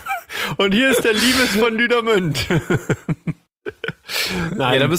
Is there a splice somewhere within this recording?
no; 0 cuts

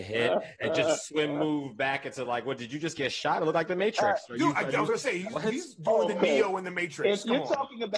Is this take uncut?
yes; 0 cuts

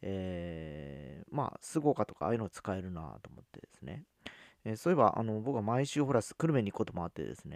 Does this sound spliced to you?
no; 0 cuts

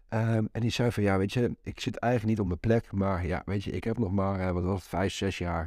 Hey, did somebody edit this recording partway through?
no; 0 cuts

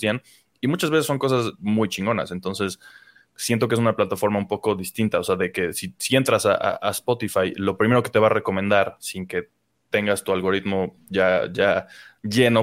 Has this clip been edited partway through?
no; 0 cuts

